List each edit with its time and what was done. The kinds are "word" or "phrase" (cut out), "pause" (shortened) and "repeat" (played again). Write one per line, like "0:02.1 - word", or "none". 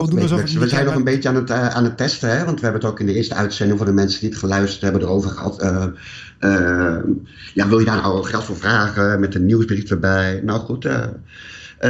none